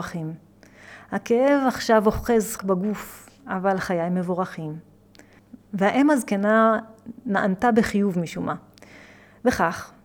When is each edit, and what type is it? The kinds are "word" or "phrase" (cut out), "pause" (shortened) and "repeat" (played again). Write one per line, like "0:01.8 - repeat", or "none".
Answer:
0:02.6 - word